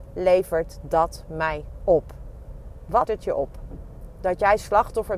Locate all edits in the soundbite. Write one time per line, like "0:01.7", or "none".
0:03.0

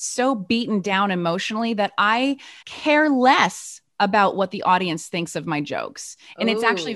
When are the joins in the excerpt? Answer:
0:02.6

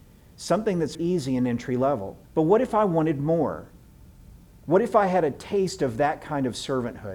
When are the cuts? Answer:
0:00.9
0:02.2

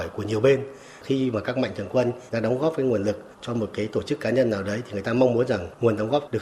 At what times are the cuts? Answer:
0:02.3
0:03.3

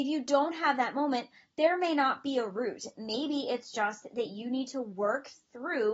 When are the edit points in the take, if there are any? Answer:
none

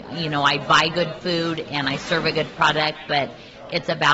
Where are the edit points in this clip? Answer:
none

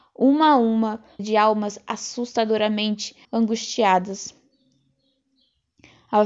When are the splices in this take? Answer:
0:01.2
0:03.2

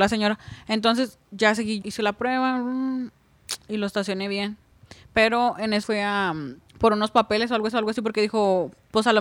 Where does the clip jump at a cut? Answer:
0:01.8
0:05.8
0:06.7
0:07.7

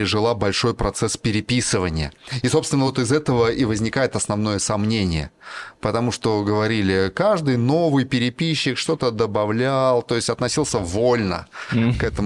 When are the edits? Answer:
none

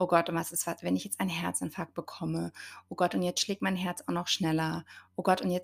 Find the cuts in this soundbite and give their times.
none

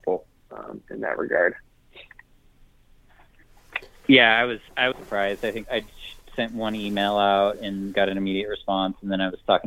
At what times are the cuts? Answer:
0:04.9
0:05.6

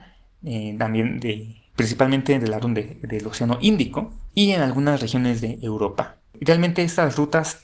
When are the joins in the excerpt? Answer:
0:02.6

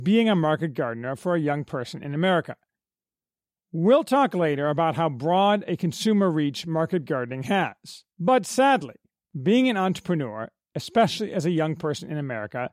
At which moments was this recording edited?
0:08.1

